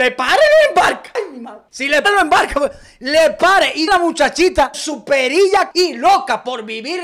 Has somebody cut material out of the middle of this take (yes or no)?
yes